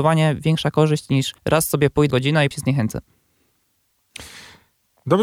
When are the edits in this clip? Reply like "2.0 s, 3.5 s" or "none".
1.4 s, 2.1 s, 2.5 s